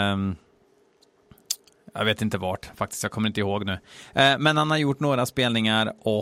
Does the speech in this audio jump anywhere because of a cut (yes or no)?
no